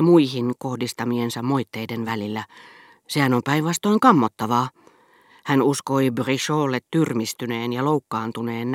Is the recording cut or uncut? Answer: uncut